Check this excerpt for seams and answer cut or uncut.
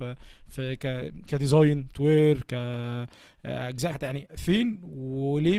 cut